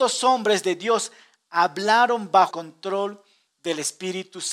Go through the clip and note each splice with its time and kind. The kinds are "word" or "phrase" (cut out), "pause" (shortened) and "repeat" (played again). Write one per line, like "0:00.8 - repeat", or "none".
0:02.5 - word

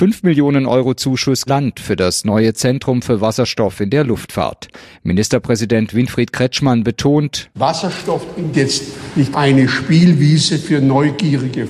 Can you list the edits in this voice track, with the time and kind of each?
0:01.5 - phrase
0:08.5 - phrase
0:09.3 - word

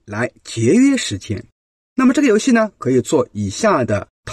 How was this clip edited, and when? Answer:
0:01.8 - pause

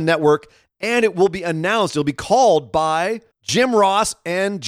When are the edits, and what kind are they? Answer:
0:03.3 - pause

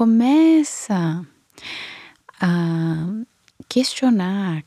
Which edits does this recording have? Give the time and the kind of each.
none

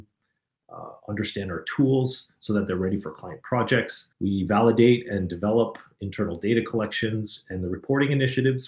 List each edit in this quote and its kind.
0:04.1 - pause

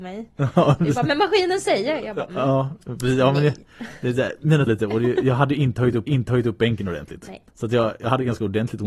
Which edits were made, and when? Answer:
0:04.7 - word
0:06.1 - repeat
0:07.5 - pause

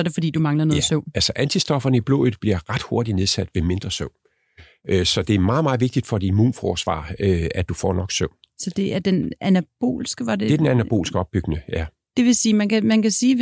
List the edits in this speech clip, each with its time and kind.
none

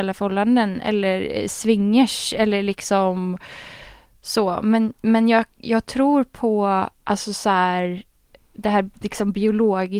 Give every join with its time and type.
0:07.0 - pause

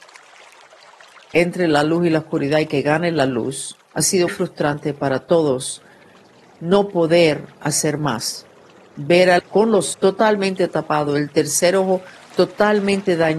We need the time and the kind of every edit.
0:04.3 - word
0:09.4 - word
0:09.9 - word

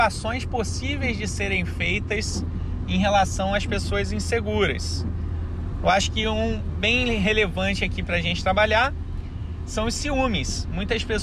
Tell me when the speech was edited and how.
none

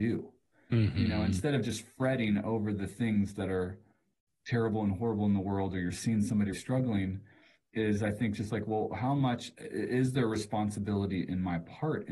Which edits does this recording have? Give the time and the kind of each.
0:06.5 - word

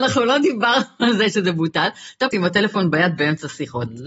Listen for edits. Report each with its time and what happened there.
0:02.3 - phrase

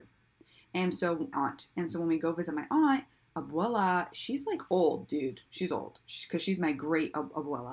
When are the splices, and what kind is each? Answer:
0:01.3 - word

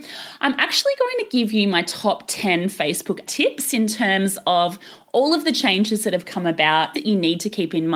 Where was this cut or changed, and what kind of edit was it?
0:03.3 - word
0:06.9 - phrase

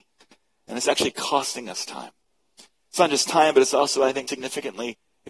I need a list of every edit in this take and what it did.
0:04.3 - word

